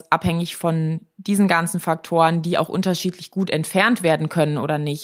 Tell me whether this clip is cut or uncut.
uncut